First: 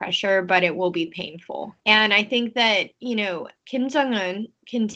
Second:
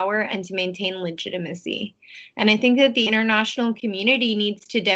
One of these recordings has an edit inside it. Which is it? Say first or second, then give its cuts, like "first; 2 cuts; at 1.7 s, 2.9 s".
first; 2 cuts; at 1.8 s, 3.6 s